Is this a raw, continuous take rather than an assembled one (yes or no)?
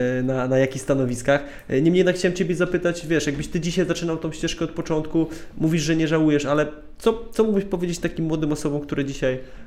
yes